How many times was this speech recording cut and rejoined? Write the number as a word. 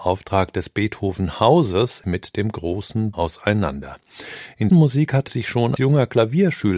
five